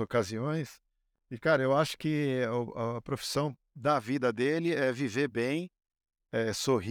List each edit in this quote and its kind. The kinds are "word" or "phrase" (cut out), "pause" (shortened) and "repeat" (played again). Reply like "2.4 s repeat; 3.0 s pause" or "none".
none